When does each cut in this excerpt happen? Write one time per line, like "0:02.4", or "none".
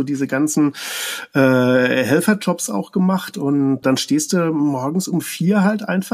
0:03.8